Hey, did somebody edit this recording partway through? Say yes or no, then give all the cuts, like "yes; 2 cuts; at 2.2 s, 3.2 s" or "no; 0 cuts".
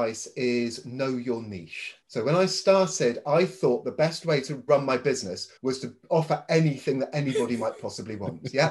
yes; 3 cuts; at 2.0 s, 4.7 s, 5.6 s